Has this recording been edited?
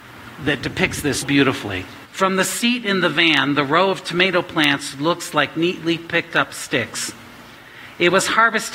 yes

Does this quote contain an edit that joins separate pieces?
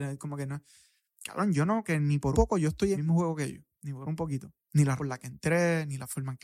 yes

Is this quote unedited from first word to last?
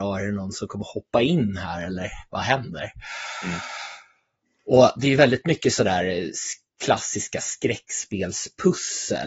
yes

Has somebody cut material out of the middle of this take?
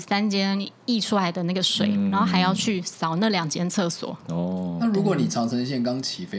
no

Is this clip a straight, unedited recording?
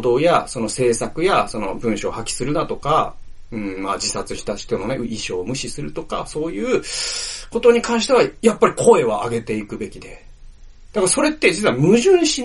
yes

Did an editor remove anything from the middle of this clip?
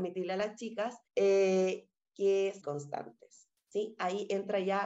yes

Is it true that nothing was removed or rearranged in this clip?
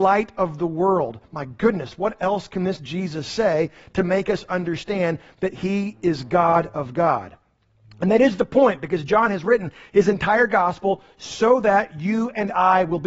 yes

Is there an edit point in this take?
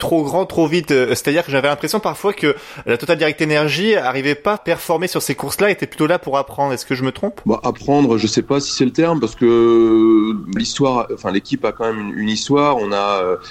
yes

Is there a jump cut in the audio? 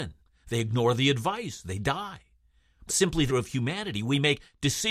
yes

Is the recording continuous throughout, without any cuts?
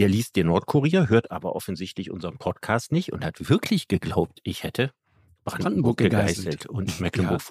yes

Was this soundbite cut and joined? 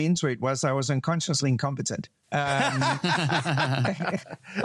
yes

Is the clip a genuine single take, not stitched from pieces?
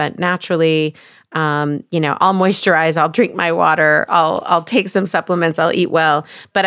yes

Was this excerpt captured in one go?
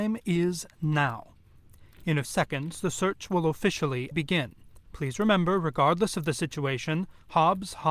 no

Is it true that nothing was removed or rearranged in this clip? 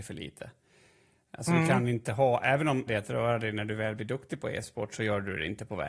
no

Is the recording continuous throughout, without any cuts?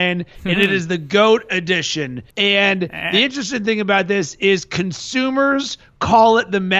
no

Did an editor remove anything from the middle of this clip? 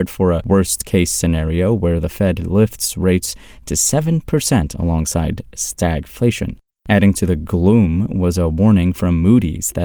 no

